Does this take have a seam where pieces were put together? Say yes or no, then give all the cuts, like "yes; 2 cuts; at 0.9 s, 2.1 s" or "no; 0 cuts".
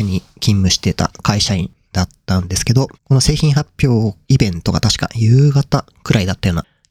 yes; 2 cuts; at 2.9 s, 4.2 s